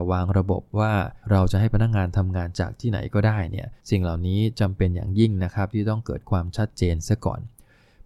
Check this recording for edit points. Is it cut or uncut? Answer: cut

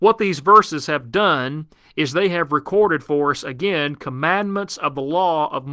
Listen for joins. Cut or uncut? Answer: uncut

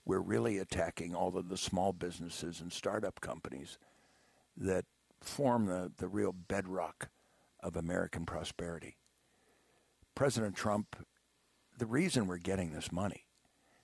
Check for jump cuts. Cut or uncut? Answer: uncut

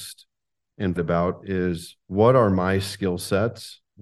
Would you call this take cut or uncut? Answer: cut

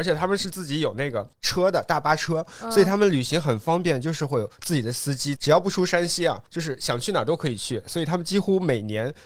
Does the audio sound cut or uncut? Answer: cut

